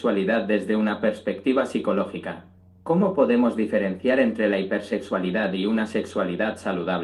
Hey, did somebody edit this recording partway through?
no; 0 cuts

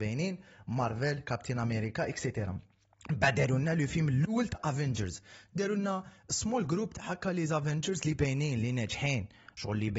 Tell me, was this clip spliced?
no; 0 cuts

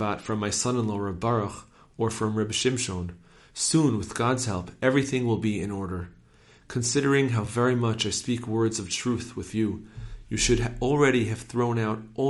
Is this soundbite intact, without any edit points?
yes; 0 cuts

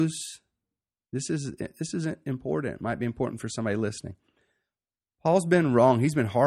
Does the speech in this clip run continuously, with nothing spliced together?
yes; 0 cuts

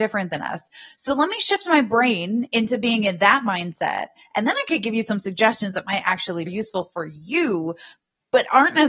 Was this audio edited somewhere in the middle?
yes; 1 cut; at 6.5 s

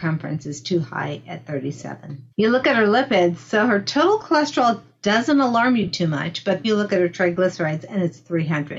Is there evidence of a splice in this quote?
yes; 2 cuts; at 2.3 s, 6.6 s

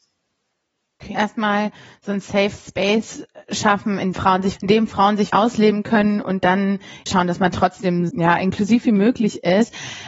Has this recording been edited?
yes; 6 cuts; at 1.1 s, 4.1 s, 4.6 s, 5.3 s, 7.1 s, 8.1 s

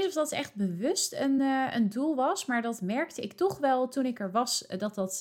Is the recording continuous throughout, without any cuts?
yes; 0 cuts

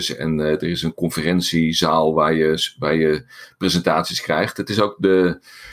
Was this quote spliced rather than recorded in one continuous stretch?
no; 0 cuts

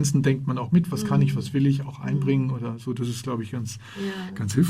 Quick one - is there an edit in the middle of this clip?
no; 0 cuts

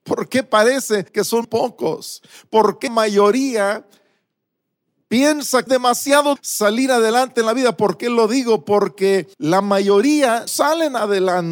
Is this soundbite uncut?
no; 7 cuts; at 1.1 s, 1.4 s, 2.9 s, 5.7 s, 6.4 s, 9.3 s, 10.5 s

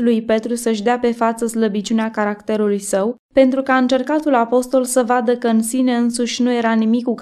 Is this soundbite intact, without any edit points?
yes; 0 cuts

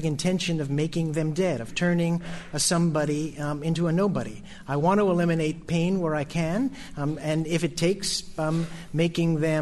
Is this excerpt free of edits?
yes; 0 cuts

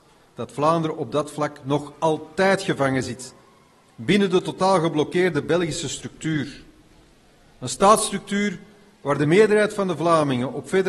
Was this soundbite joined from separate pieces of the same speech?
no; 0 cuts

